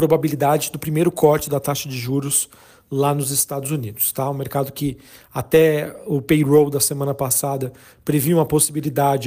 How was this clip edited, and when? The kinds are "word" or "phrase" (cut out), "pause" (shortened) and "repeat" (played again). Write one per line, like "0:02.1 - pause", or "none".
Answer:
none